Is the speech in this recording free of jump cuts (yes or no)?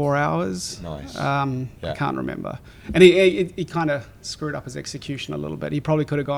no